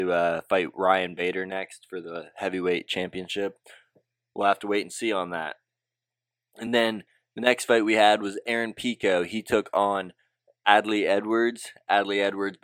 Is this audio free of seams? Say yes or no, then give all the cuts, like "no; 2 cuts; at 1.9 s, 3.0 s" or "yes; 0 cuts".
yes; 0 cuts